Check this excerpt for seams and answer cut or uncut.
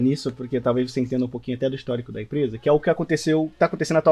uncut